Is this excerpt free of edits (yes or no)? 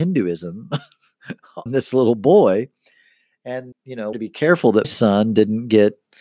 no